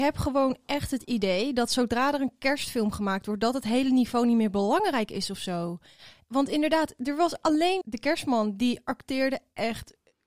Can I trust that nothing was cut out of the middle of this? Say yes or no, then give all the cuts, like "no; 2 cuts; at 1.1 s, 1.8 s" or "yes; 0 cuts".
no; 1 cut; at 7.8 s